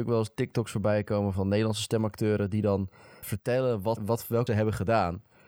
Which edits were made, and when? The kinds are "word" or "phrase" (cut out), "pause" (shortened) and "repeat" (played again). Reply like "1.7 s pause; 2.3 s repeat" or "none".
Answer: 1.3 s word; 3.2 s word; 4.0 s word; 4.5 s word